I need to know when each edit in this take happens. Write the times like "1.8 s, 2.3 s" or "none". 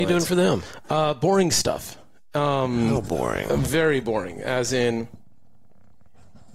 none